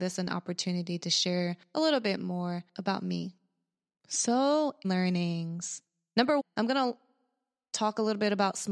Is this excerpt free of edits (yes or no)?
no